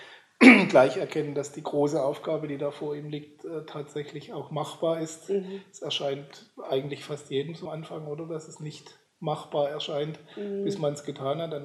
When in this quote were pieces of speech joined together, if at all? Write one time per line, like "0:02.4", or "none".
0:07.7